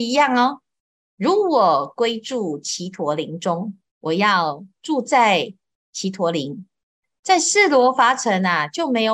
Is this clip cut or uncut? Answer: cut